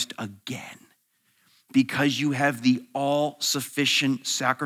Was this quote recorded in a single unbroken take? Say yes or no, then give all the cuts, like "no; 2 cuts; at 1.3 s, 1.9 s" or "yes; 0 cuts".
yes; 0 cuts